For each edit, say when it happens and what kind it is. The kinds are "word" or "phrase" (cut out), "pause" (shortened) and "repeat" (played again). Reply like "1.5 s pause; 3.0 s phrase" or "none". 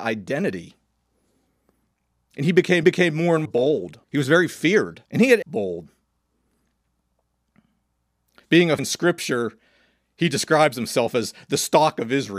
2.8 s repeat; 3.5 s word; 4.0 s pause; 5.1 s pause; 5.4 s phrase; 8.8 s phrase